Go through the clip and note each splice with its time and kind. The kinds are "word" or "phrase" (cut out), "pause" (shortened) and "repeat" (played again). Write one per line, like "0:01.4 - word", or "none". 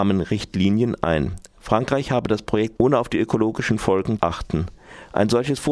0:02.8 - word
0:04.2 - word